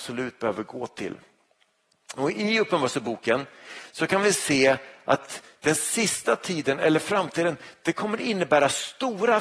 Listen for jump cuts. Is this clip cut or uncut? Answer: uncut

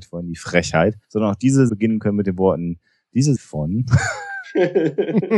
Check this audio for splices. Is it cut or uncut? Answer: cut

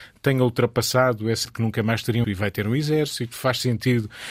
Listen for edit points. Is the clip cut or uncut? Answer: cut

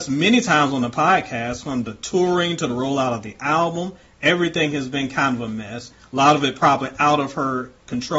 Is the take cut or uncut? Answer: uncut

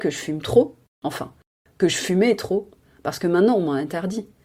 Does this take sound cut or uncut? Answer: uncut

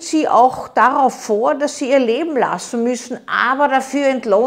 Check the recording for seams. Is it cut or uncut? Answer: uncut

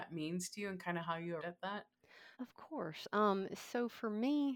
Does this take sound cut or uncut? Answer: cut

